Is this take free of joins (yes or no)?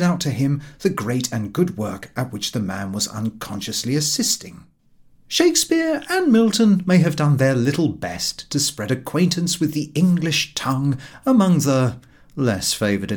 no